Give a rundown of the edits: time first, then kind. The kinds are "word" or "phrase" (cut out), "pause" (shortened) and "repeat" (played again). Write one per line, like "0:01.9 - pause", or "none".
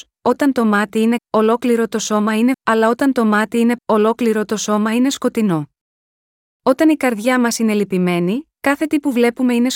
0:01.2 - word
0:02.5 - word
0:03.8 - word